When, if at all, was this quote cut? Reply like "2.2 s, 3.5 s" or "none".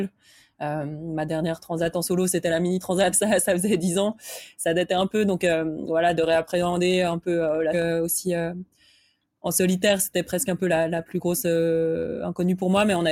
3.1 s, 7.7 s